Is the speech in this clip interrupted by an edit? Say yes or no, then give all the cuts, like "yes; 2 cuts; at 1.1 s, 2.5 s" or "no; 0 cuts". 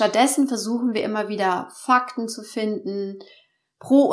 no; 0 cuts